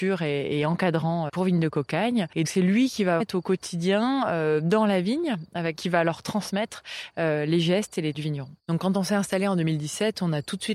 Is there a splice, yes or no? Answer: yes